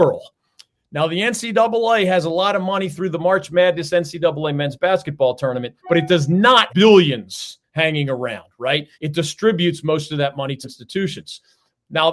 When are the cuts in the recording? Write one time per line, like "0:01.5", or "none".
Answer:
0:05.8
0:06.7
0:08.9
0:10.6